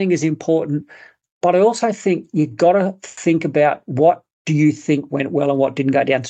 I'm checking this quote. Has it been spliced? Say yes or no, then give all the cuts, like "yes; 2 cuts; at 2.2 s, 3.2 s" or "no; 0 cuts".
no; 0 cuts